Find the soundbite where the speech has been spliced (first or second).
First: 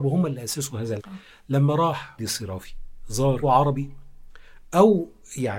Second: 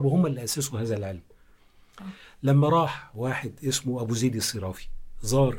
first